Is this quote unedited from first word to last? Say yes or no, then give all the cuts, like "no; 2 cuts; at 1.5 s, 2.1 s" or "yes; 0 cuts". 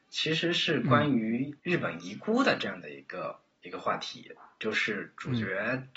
no; 1 cut; at 1.6 s